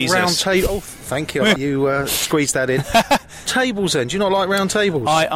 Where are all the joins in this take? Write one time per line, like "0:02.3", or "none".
0:01.6
0:03.5